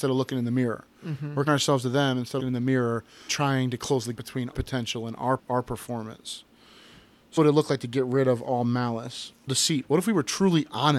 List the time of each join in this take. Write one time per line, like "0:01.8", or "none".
0:01.5
0:02.4
0:03.3
0:04.2
0:04.5
0:05.4
0:07.4
0:09.5